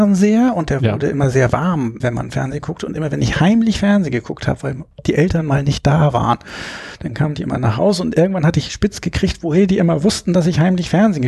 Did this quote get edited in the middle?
yes; 1 cut; at 2.0 s

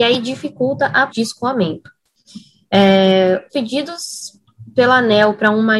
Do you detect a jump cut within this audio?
yes; 2 cuts; at 1.1 s, 3.5 s

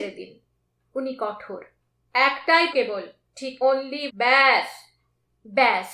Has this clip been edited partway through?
yes; 3 cuts; at 2.7 s, 3.6 s, 4.1 s

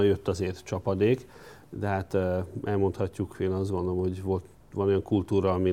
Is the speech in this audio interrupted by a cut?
no; 0 cuts

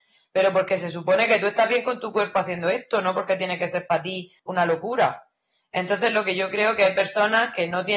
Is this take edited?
yes; 1 cut; at 4.4 s

